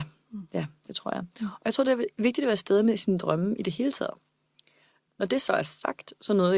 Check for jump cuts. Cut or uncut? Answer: uncut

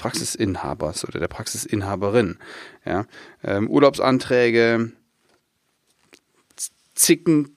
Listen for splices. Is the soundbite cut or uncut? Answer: uncut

